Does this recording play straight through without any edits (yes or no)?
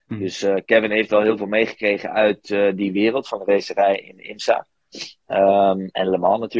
yes